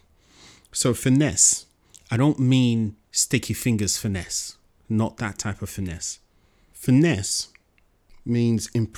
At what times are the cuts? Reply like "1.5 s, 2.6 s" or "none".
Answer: 3.0 s